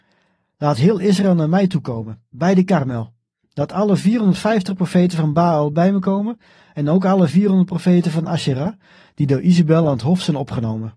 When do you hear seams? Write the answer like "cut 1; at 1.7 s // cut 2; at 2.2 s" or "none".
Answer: none